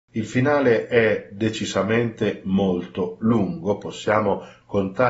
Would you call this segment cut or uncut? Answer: uncut